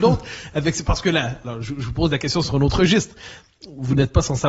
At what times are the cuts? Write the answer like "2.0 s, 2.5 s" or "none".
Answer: none